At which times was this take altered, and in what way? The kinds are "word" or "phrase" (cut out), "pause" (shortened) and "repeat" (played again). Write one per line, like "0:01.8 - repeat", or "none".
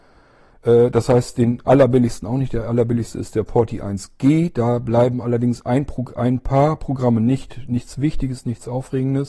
none